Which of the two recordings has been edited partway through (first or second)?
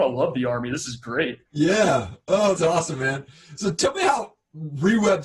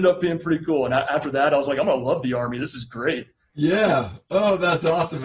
first